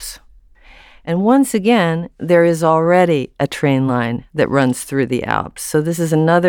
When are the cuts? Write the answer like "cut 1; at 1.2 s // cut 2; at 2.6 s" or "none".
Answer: none